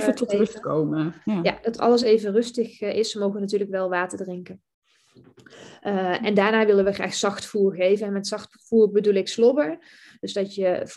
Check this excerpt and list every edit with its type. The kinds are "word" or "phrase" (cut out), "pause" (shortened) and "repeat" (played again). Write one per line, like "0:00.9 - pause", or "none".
none